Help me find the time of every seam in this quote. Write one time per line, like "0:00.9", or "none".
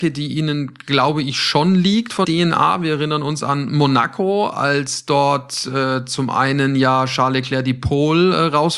0:02.2